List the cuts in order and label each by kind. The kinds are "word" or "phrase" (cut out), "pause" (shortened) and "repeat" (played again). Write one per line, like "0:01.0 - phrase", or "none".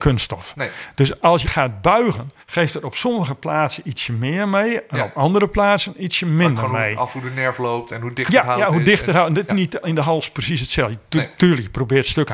0:01.4 - word
0:02.4 - pause
0:09.5 - word
0:09.8 - word